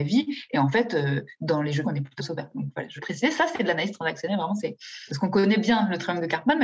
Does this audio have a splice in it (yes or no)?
yes